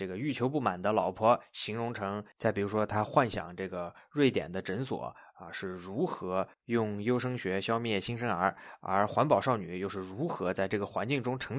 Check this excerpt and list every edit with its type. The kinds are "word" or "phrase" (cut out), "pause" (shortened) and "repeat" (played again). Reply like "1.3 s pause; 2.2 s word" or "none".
2.3 s word